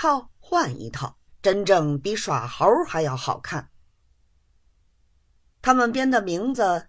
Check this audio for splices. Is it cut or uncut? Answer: cut